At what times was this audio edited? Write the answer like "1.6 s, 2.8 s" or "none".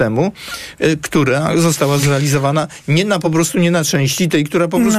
none